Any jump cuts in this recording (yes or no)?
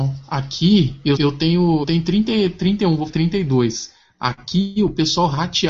yes